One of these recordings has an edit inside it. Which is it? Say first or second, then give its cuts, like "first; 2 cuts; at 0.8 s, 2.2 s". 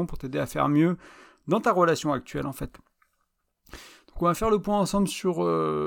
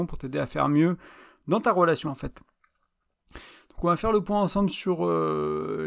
second; 1 cut; at 2.1 s